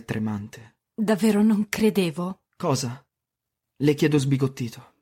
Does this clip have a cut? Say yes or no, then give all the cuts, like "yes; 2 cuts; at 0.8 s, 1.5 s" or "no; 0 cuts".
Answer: no; 0 cuts